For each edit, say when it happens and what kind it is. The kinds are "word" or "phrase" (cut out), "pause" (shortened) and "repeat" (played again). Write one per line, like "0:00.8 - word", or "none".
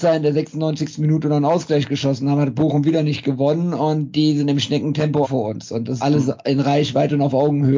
0:05.2 - word
0:06.0 - word

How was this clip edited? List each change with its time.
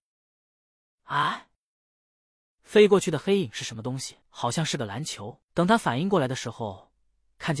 0:04.2 - pause

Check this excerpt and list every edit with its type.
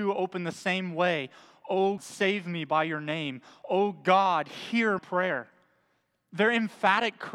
0:02.0 - word
0:05.0 - word

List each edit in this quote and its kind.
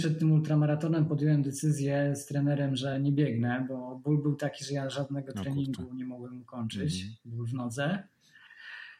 none

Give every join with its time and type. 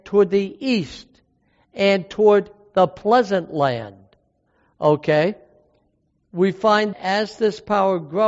0:06.9 - word

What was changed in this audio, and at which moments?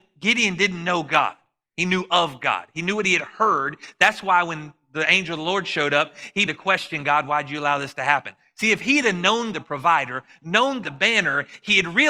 0:06.5 - word
0:09.5 - word
0:10.8 - word

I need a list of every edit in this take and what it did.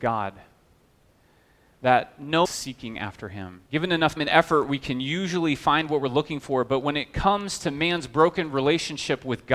0:02.4 - phrase
0:03.7 - pause
0:04.2 - word

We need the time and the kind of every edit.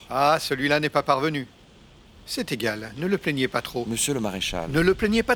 none

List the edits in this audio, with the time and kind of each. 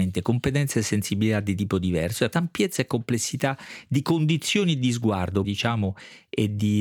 0:02.3 - word
0:05.4 - word

